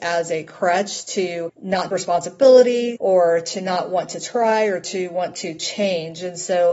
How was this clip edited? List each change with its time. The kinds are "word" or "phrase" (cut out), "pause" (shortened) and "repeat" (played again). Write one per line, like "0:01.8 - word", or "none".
0:01.9 - word